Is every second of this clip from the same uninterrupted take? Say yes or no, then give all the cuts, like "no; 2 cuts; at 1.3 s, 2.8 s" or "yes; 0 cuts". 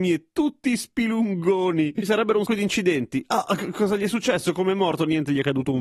no; 1 cut; at 2.5 s